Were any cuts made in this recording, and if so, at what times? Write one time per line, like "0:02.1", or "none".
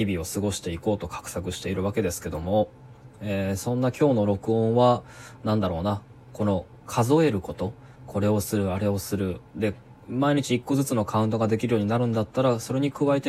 0:07.9

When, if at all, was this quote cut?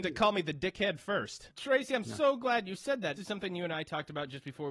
0:03.2

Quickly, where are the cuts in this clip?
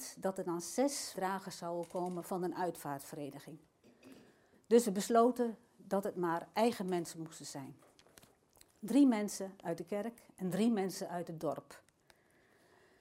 0:01.1

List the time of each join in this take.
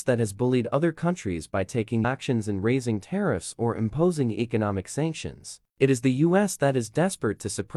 0:02.0

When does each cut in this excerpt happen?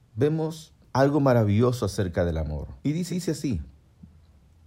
0:02.8
0:03.1

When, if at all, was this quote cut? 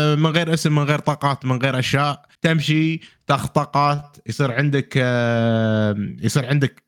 0:02.3

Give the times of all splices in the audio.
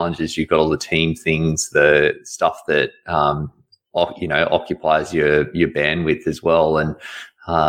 none

